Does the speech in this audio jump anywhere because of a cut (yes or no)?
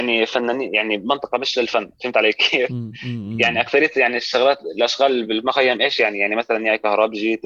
no